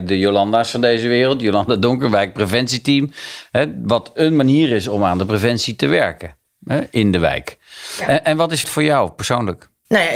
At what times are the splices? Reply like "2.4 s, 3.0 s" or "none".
8.6 s